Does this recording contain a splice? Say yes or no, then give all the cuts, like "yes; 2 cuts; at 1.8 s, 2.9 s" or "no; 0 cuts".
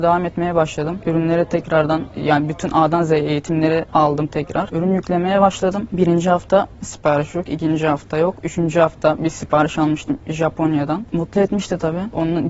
no; 0 cuts